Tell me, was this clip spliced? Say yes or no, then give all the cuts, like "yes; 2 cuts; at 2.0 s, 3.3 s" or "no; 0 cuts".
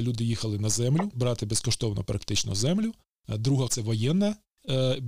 yes; 1 cut; at 3.7 s